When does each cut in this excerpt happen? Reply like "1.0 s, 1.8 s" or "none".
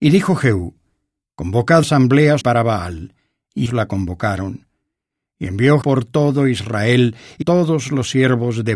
1.8 s, 2.4 s, 3.7 s, 5.8 s, 7.4 s